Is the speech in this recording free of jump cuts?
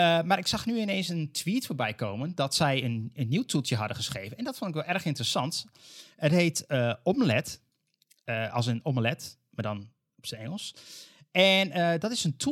yes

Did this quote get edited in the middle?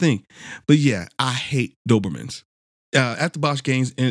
no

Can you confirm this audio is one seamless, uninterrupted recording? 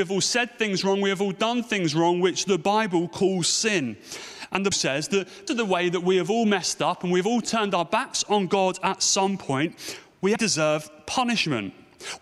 no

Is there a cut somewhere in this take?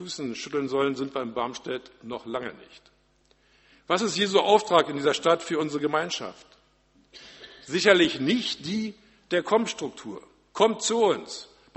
no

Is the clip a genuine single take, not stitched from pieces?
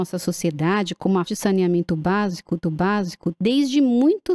no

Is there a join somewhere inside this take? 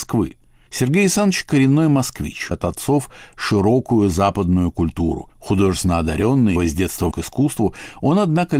yes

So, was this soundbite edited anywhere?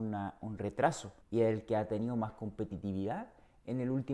yes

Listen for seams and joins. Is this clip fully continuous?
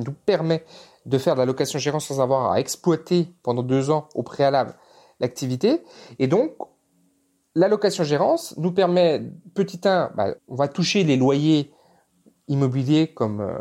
no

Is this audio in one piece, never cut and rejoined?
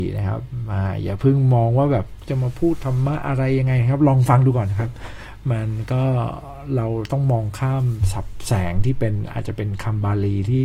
no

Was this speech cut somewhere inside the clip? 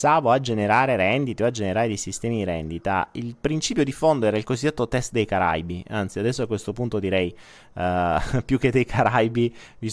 no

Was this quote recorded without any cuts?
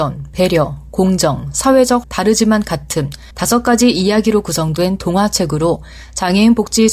no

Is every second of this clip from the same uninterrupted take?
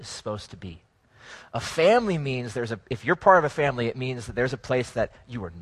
yes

